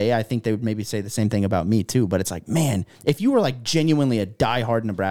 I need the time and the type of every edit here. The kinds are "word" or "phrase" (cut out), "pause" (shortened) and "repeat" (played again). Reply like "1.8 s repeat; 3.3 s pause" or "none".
2.9 s pause